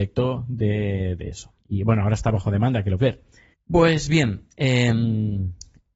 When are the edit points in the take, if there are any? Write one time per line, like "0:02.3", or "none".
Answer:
0:01.6
0:03.0
0:03.5